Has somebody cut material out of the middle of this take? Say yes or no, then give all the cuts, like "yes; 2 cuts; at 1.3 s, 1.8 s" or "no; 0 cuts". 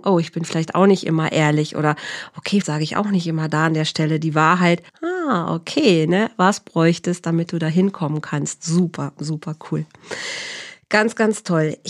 yes; 2 cuts; at 2.6 s, 4.9 s